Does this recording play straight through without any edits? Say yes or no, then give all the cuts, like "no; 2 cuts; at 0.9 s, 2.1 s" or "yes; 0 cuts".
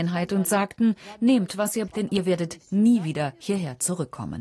no; 1 cut; at 1.9 s